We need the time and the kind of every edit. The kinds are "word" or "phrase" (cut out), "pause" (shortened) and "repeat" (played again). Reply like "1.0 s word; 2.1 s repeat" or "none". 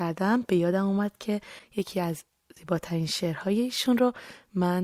none